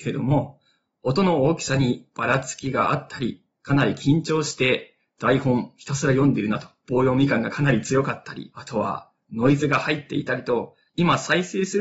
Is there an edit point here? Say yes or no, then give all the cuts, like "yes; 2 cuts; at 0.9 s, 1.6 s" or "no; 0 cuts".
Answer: yes; 1 cut; at 3.5 s